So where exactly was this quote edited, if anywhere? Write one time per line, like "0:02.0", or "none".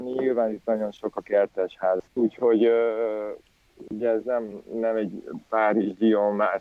0:02.1